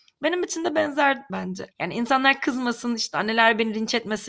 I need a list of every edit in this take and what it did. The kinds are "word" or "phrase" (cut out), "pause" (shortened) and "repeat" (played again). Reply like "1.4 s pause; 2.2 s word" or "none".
1.3 s word; 1.7 s pause

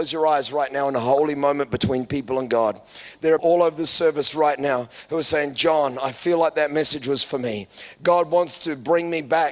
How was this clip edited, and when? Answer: 3.4 s word

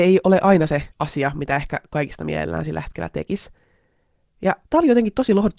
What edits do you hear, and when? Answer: 0.9 s pause; 4.6 s pause

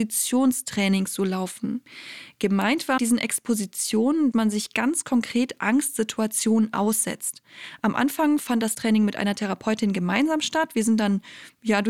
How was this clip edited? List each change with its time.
3.0 s word; 4.3 s word; 8.7 s word

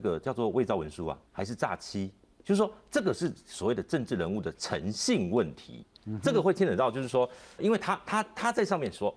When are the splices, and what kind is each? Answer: 1.3 s pause; 7.6 s word

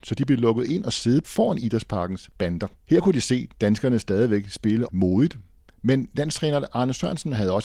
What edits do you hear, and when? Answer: 1.2 s word; 2.8 s pause; 4.9 s word

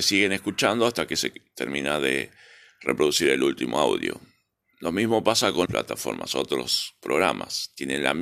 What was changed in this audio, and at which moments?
5.7 s word

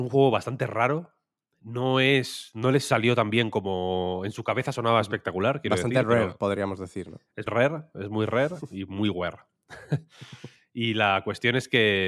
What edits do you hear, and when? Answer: 7.5 s word

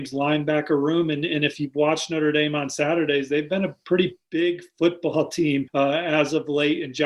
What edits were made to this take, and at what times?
none

